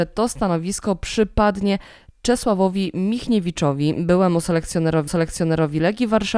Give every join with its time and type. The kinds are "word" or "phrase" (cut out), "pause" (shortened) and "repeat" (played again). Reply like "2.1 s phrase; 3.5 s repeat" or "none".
5.1 s repeat